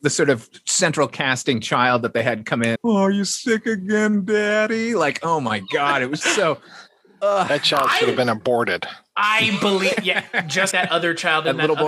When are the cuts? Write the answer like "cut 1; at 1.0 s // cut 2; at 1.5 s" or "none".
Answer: cut 1; at 2.8 s // cut 2; at 6.2 s // cut 3; at 10.7 s